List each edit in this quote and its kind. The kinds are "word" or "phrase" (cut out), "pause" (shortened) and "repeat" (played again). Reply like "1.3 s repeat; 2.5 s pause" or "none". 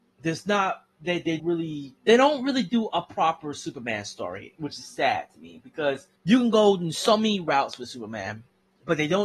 1.4 s word; 2.0 s pause; 6.2 s pause